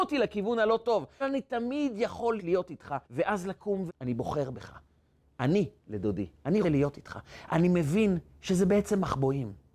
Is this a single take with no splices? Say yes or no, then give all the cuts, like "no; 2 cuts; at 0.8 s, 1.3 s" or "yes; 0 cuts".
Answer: no; 7 cuts; at 1.2 s, 2.4 s, 3.0 s, 3.9 s, 5.8 s, 6.6 s, 8.3 s